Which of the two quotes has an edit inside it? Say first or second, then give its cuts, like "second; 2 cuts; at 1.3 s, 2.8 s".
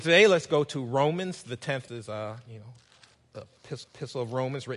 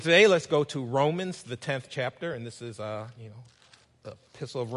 first; 2 cuts; at 1.9 s, 3.8 s